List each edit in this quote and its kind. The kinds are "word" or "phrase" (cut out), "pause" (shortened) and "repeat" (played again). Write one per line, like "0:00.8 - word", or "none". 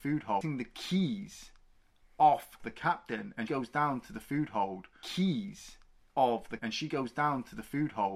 0:02.6 - word
0:03.5 - word
0:06.1 - word
0:06.6 - word